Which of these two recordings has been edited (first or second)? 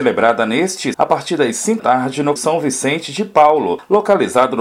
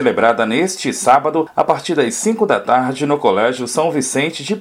first